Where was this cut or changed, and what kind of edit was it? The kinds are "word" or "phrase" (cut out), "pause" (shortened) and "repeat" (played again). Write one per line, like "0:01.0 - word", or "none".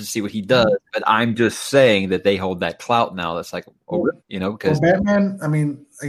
0:04.2 - pause